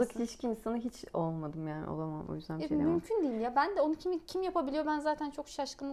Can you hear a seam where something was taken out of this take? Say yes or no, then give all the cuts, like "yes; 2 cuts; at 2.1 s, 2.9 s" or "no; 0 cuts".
no; 0 cuts